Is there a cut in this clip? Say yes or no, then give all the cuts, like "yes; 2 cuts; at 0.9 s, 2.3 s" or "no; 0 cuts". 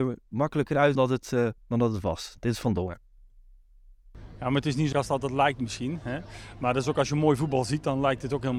yes; 3 cuts; at 0.9 s, 1.6 s, 4.9 s